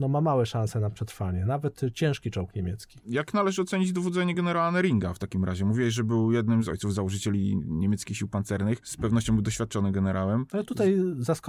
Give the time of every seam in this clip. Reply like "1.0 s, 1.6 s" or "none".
none